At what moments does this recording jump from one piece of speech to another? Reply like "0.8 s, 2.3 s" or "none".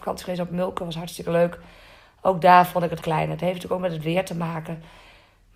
3.0 s